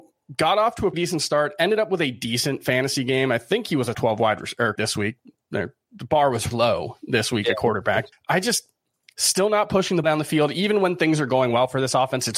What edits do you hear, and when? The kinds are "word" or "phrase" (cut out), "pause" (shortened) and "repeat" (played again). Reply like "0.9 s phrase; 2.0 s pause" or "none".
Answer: 0.9 s word; 3.9 s word; 4.8 s word; 6.5 s word; 8.1 s word; 10.0 s word

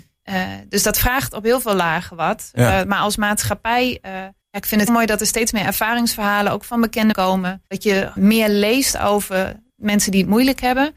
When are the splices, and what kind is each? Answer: 4.4 s pause; 4.9 s word; 7.1 s phrase; 7.7 s pause; 8.2 s word

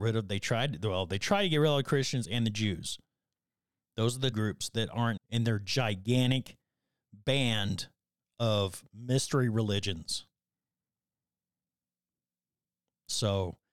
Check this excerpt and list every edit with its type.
4.3 s word; 5.2 s word

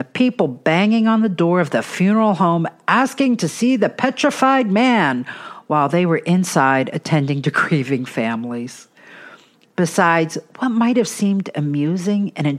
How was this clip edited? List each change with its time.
none

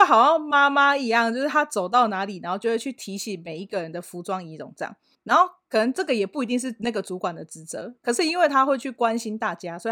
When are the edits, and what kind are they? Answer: 5.1 s pause

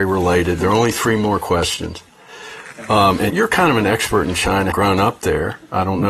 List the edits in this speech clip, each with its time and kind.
3.3 s word; 4.7 s word

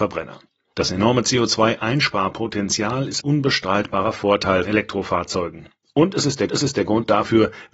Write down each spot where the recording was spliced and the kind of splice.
3.2 s word; 4.6 s word; 6.5 s repeat

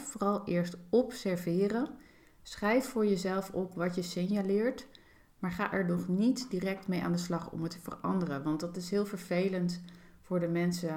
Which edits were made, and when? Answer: none

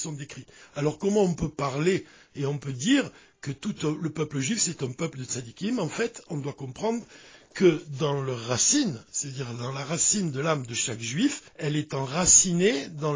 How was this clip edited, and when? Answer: 11.5 s pause

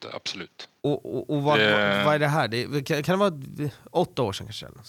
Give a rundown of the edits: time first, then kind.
none

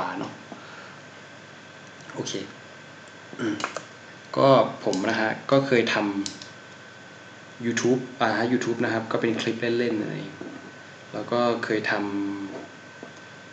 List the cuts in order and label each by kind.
none

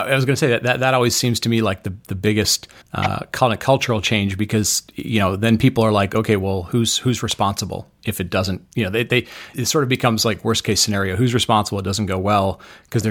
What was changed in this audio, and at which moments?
2.8 s pause; 9.5 s word

